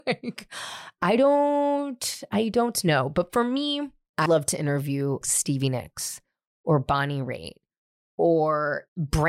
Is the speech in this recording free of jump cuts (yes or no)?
no